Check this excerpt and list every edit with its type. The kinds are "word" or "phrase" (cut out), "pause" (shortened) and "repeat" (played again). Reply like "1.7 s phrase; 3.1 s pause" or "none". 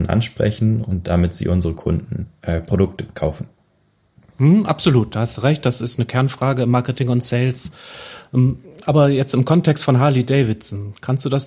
none

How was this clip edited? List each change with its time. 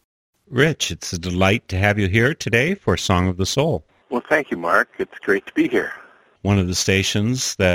none

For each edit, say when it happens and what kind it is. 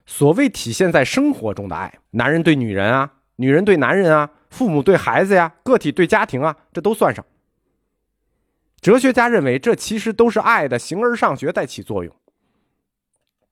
2.1 s pause

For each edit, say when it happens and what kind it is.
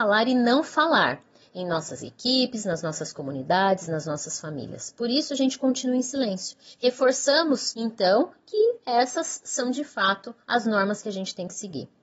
none

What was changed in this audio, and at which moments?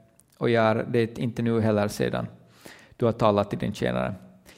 none

